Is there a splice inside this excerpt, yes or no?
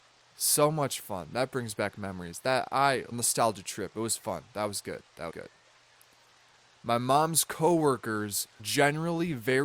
yes